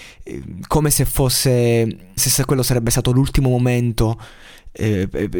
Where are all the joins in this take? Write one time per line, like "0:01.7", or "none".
0:02.2